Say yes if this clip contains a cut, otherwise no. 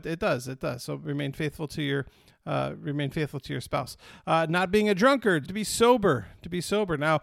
yes